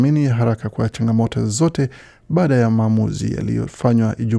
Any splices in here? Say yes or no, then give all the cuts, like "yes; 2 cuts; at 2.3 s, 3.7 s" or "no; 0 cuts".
no; 0 cuts